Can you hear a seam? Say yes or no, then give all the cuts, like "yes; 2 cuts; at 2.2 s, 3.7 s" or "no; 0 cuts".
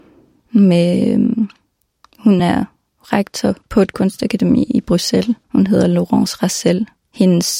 no; 0 cuts